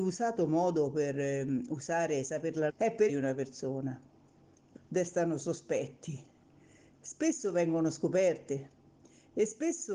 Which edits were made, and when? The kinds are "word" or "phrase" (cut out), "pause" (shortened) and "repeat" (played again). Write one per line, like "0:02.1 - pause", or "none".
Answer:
0:02.7 - word
0:03.1 - phrase
0:04.7 - phrase

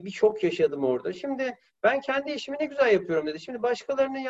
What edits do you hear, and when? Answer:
none

